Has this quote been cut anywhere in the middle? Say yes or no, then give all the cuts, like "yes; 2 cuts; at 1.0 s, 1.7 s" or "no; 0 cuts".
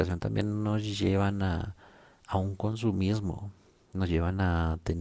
no; 0 cuts